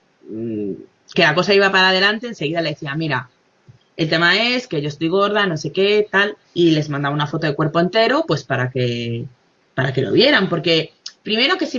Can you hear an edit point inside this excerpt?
yes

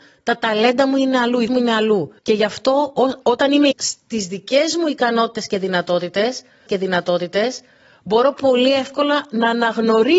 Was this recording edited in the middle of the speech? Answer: yes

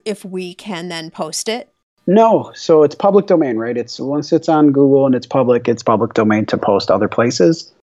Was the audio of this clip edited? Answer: no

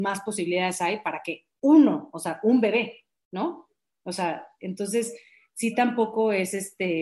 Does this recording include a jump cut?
no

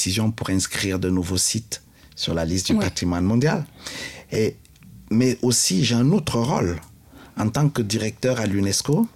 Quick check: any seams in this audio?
no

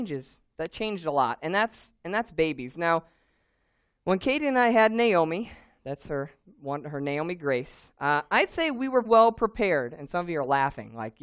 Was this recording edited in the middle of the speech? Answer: yes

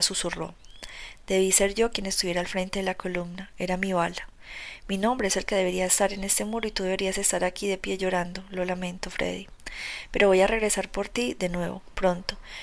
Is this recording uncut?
yes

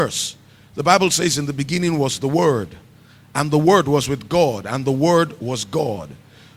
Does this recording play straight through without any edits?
yes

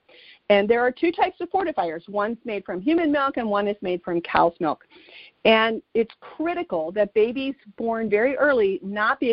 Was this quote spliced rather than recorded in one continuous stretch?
no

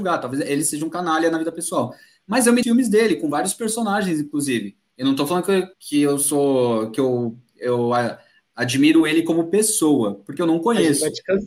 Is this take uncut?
no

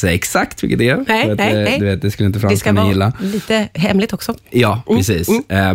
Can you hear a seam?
no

